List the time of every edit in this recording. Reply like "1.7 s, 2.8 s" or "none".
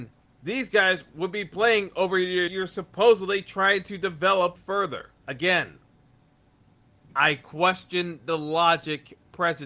2.5 s, 4.6 s, 5.2 s